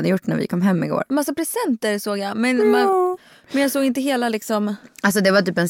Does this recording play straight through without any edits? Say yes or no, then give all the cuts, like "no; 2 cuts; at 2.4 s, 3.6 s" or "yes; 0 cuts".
yes; 0 cuts